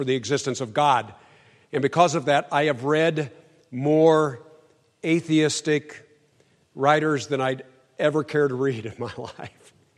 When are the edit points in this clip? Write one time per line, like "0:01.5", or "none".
none